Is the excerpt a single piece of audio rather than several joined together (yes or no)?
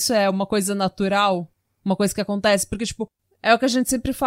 yes